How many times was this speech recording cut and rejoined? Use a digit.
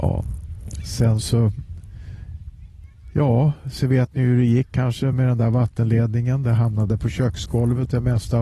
0